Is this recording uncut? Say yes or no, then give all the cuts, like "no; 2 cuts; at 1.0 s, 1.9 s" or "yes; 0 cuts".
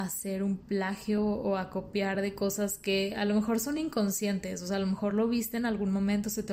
yes; 0 cuts